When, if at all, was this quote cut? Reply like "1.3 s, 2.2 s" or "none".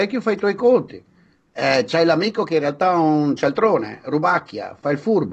none